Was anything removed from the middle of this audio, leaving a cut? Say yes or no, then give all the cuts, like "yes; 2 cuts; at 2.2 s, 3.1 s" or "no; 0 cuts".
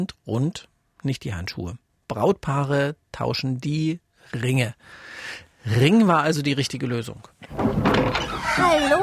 no; 0 cuts